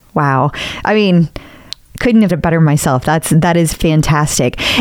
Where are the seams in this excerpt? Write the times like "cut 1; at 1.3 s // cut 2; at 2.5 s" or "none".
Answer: cut 1; at 2.3 s